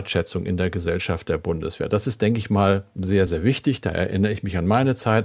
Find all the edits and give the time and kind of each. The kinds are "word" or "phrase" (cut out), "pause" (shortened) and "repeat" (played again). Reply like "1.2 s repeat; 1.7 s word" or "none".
none